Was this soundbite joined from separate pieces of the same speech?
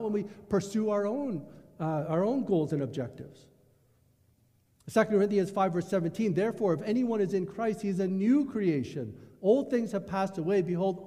no; 0 cuts

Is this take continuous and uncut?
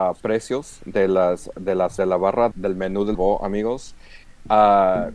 no; 3 cuts; at 2.0 s, 2.5 s, 3.1 s

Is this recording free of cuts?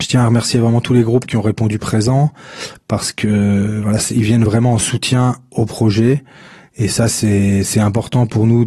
yes; 0 cuts

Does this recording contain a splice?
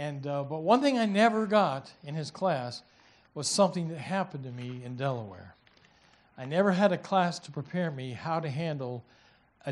no; 0 cuts

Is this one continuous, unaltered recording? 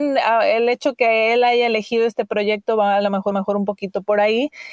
no; 1 cut; at 3.3 s

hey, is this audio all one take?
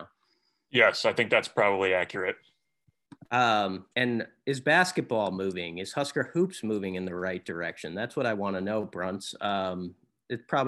no; 1 cut; at 3.9 s

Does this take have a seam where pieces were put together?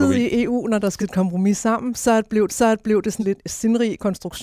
yes; 3 cuts; at 1.0 s, 2.5 s, 3.2 s

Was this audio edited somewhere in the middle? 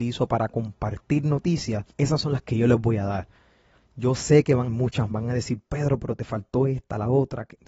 yes; 3 cuts; at 1.9 s, 4.7 s, 5.1 s

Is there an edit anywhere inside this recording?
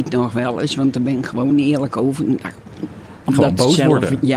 no; 0 cuts

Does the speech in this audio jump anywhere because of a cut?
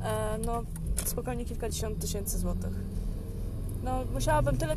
no; 0 cuts

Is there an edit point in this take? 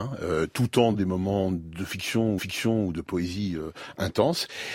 yes; 2 cuts; at 0.9 s, 2.4 s

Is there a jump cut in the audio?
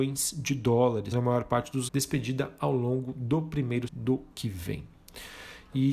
yes; 4 cuts; at 1.1 s, 1.9 s, 3.9 s, 4.3 s

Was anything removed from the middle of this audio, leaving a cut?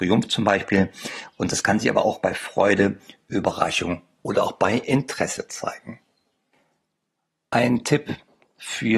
no; 0 cuts

